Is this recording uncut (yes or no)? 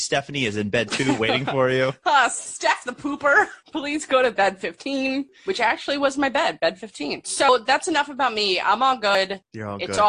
yes